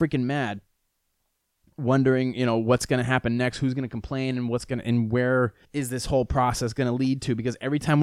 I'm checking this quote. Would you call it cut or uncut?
cut